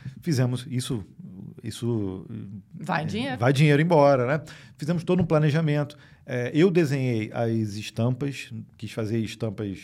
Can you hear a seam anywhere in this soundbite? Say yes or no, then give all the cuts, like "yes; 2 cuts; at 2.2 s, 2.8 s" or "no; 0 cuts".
no; 0 cuts